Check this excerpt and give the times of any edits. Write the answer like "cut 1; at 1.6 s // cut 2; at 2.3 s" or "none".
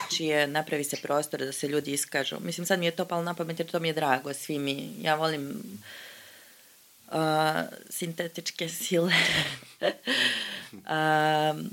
none